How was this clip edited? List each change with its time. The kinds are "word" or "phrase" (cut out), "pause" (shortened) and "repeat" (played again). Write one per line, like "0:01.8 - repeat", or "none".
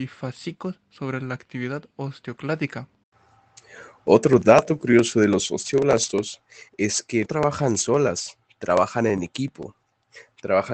0:06.7 - pause
0:07.2 - word